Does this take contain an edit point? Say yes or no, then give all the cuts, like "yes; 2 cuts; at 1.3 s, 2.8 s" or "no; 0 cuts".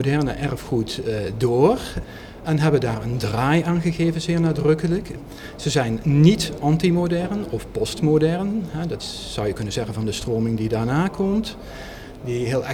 no; 0 cuts